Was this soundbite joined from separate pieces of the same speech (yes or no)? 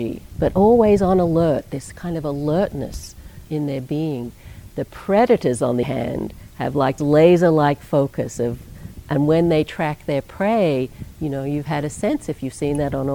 yes